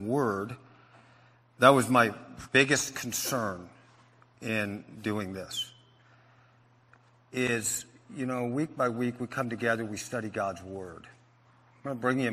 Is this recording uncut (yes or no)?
yes